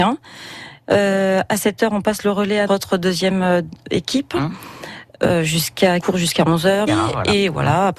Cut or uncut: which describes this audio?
cut